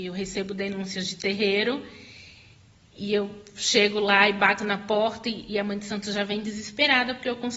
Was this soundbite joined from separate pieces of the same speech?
no; 0 cuts

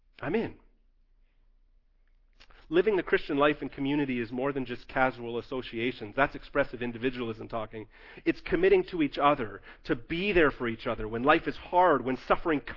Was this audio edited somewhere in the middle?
no; 0 cuts

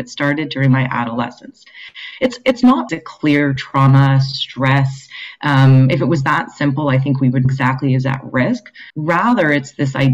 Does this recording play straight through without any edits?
no; 4 cuts; at 2.9 s, 3.6 s, 7.4 s, 8.9 s

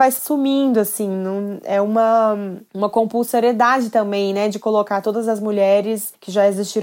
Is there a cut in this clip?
no; 0 cuts

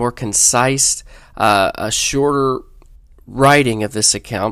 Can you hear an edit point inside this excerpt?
no; 0 cuts

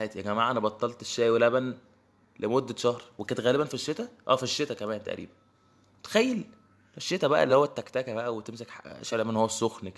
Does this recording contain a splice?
no; 0 cuts

